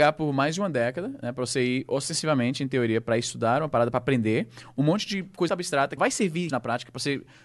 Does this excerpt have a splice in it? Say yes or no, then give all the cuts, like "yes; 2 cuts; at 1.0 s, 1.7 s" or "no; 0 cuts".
yes; 3 cuts; at 5.5 s, 6.0 s, 6.5 s